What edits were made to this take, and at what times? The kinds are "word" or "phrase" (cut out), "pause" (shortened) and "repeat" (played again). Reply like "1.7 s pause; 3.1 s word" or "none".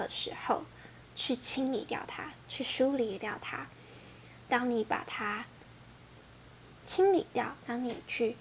none